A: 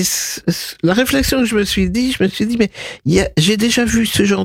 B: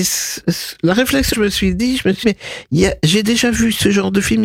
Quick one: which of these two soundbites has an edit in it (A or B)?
B